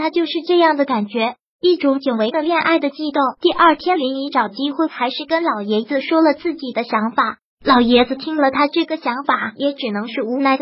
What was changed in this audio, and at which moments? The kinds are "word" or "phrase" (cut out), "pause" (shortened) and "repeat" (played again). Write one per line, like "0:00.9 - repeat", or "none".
0:03.4 - pause